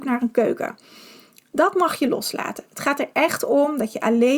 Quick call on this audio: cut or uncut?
uncut